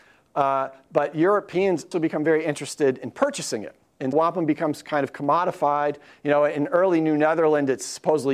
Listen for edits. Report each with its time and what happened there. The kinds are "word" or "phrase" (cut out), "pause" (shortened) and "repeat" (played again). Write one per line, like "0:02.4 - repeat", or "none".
0:01.9 - word
0:04.1 - word